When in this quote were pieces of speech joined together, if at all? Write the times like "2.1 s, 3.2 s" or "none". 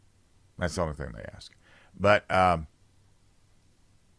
none